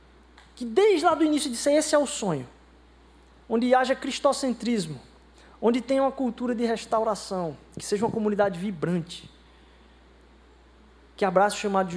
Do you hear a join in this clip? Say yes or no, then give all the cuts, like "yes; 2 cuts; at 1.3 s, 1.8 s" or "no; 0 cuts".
no; 0 cuts